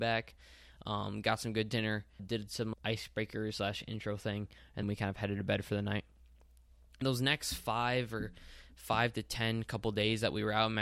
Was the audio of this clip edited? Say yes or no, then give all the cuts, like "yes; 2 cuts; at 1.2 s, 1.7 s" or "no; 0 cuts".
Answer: yes; 4 cuts; at 2.2 s, 2.7 s, 4.8 s, 7.0 s